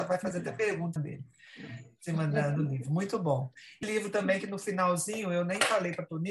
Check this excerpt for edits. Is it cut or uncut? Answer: cut